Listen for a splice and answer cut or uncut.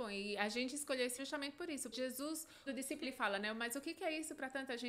cut